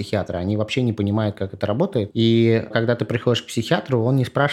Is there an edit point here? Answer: no; 0 cuts

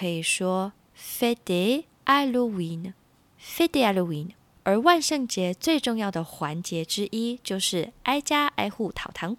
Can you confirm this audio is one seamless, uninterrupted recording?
no; 3 cuts; at 1.9 s, 3.0 s, 4.5 s

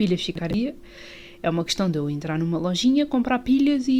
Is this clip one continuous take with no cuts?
yes; 0 cuts

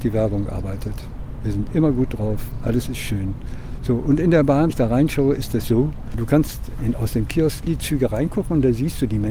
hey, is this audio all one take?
no; 3 cuts; at 4.7 s, 5.6 s, 7.7 s

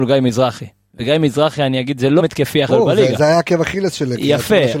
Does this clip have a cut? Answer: yes; 2 cuts; at 2.2 s, 2.7 s

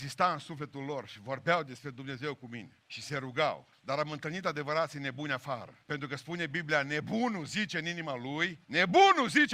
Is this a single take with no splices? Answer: no; 4 cuts; at 2.9 s, 3.7 s, 5.8 s, 8.6 s

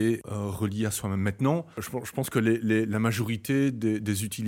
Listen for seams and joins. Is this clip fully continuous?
yes; 0 cuts

